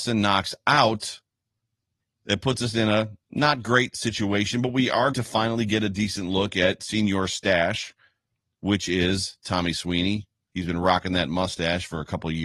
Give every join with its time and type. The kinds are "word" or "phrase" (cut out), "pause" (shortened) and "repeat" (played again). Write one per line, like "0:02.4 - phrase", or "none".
0:05.1 - word

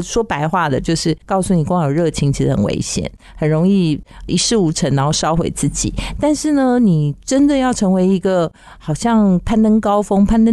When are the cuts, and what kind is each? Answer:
0:01.2 - pause

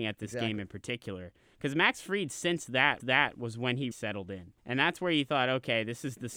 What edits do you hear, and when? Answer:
0:03.0 - repeat
0:03.9 - word
0:04.6 - pause

